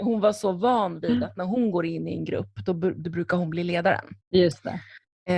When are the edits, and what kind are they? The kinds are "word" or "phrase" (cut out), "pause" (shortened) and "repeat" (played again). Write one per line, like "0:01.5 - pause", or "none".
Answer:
0:04.2 - pause